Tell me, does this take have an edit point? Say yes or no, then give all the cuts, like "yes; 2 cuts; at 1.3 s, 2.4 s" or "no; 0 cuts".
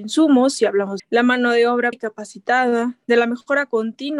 yes; 2 cuts; at 1.0 s, 1.9 s